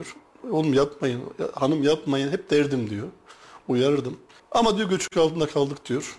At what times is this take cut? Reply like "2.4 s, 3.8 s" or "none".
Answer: 4.4 s